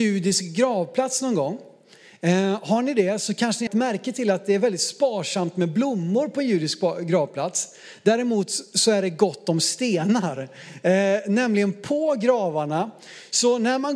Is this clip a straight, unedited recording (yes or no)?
no